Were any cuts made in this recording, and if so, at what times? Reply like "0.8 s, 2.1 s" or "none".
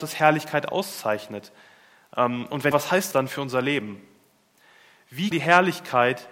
2.7 s, 3.1 s, 5.3 s